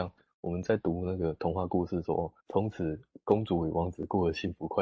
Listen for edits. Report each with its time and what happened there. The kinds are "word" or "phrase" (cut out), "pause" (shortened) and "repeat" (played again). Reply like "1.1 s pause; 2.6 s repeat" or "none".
2.4 s pause